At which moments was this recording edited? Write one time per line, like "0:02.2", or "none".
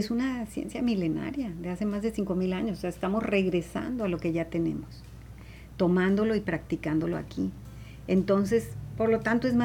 none